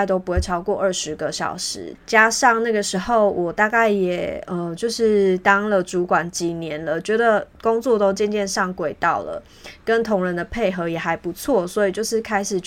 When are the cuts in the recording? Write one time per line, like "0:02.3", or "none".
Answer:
0:02.0